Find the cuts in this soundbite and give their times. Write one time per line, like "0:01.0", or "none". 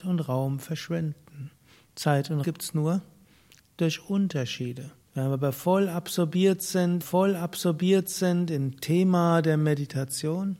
0:02.4
0:05.0
0:07.0